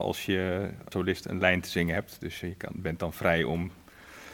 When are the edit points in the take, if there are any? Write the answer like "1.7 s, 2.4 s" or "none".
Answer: 0.9 s